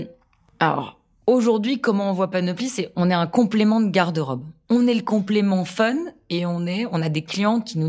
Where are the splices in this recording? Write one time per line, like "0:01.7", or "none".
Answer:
none